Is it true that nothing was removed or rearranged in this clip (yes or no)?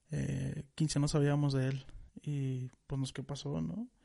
no